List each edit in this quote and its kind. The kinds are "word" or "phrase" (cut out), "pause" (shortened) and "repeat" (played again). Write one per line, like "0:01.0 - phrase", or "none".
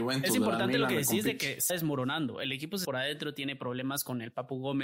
0:01.7 - word
0:02.8 - phrase